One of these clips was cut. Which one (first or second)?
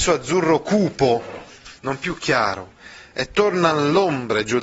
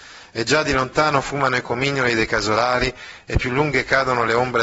first